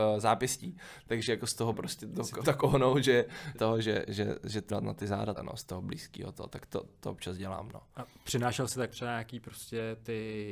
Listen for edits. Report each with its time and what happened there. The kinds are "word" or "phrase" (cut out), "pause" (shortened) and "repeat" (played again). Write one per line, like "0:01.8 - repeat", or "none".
0:01.7 - word
0:02.4 - word
0:03.5 - word
0:04.7 - word
0:05.4 - word
0:06.9 - word
0:08.9 - word